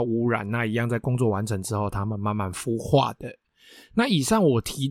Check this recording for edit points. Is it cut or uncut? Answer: uncut